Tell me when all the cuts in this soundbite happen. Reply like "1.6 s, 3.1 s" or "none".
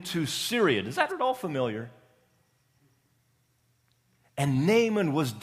1.1 s